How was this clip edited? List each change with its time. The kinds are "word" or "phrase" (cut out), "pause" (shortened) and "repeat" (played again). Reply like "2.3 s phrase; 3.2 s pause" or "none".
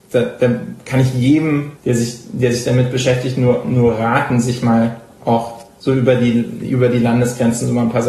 1.8 s pause